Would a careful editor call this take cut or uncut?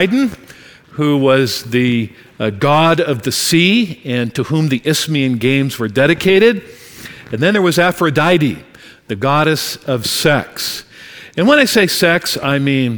uncut